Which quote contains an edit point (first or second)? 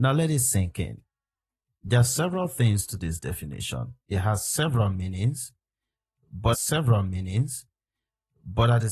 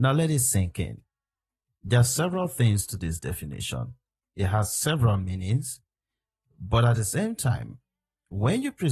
first